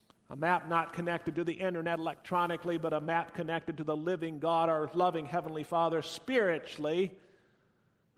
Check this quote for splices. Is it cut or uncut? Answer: uncut